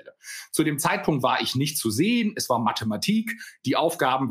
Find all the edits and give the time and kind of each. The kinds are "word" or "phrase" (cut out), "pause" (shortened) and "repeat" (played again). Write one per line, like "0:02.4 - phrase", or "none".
none